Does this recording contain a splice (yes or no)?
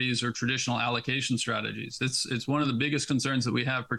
no